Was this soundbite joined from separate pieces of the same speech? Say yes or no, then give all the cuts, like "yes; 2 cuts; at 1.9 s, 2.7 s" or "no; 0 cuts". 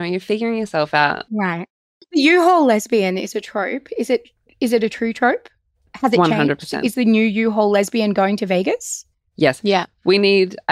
no; 0 cuts